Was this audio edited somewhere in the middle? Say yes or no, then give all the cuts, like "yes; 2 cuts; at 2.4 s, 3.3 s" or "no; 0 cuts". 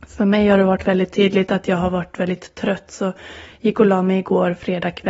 no; 0 cuts